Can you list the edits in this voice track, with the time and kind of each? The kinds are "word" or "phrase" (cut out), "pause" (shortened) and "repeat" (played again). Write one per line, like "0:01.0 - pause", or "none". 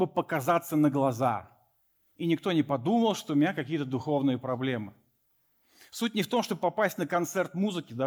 none

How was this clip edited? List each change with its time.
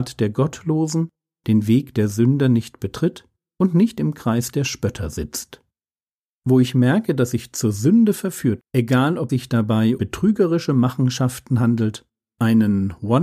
0:08.6 - word
0:09.3 - word
0:10.0 - word

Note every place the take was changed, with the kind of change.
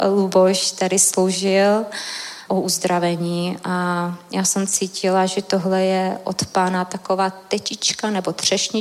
0:02.5 - word

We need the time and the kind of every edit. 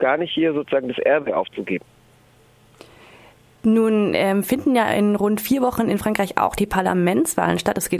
none

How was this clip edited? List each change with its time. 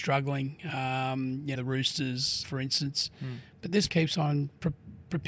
0:01.5 - word
0:02.4 - word
0:03.9 - word

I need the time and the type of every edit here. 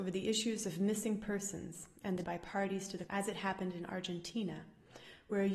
0:02.2 - word
0:03.1 - word

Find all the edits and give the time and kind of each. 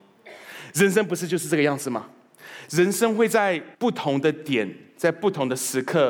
0:03.7 - pause

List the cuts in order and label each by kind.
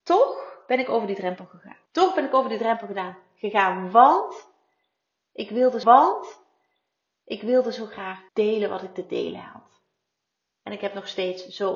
0:01.9 - pause
0:05.8 - repeat
0:08.3 - pause

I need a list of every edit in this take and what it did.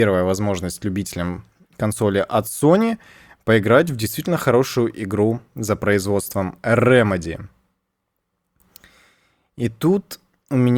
none

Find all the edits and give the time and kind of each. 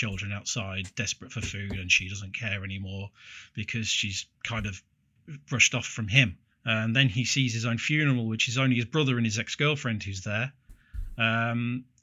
0:06.5 - pause

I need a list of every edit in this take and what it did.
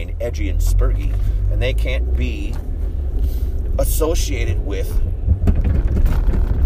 none

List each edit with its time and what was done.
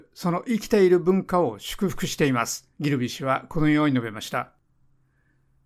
0:02.7 - pause

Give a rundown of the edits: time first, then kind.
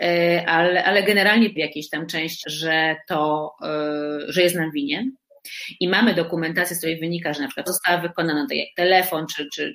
0:01.6 - word
0:02.4 - word
0:07.7 - word

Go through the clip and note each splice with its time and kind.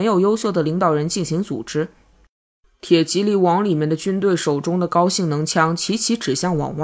none

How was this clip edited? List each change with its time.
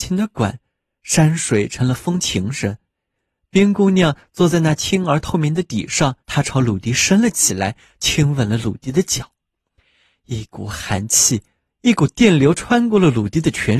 0:06.2 - pause

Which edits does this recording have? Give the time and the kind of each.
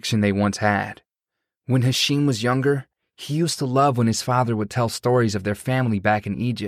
none

